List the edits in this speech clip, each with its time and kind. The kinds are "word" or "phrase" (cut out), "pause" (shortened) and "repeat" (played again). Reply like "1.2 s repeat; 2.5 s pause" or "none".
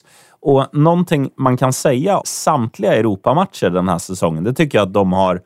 2.2 s word